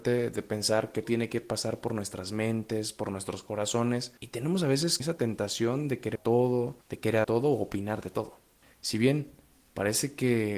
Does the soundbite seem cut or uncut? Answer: cut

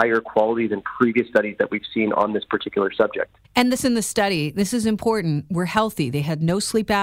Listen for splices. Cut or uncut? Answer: cut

